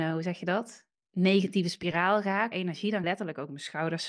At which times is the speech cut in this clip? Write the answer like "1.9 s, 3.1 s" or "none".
2.5 s, 3.0 s